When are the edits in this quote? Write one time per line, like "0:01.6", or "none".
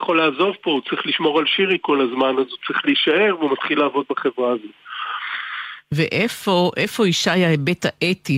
0:05.8

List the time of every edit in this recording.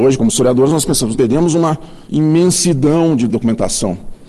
0:01.1
0:02.0

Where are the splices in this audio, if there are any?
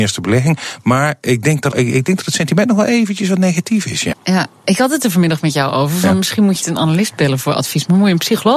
0:01.7
0:04.1
0:06.6

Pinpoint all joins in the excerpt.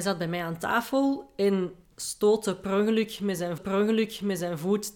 0:01.9
0:03.6

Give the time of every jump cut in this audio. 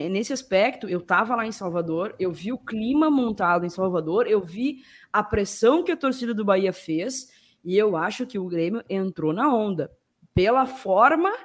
none

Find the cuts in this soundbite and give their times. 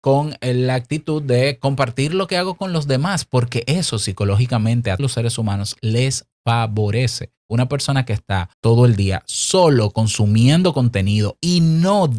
0:05.0
0:07.4
0:08.5

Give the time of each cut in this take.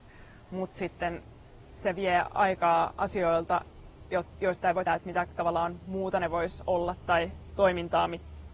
0:04.9

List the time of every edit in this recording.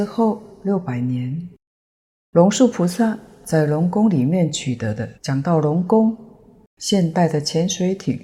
0:05.1

